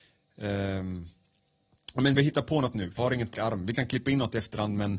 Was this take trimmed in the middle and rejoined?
yes; 4 cuts; at 2.2 s, 3.0 s, 3.3 s, 3.7 s

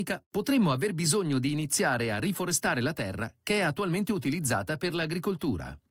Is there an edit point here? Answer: no; 0 cuts

